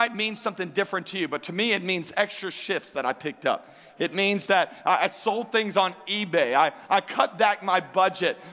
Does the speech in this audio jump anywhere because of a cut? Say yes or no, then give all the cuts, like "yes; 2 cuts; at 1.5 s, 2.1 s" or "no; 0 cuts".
no; 0 cuts